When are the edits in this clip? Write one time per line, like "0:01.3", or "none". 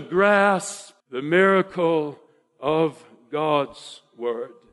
0:01.0